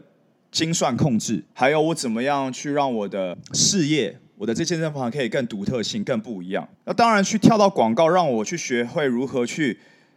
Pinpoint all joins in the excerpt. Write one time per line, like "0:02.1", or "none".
0:01.5
0:06.7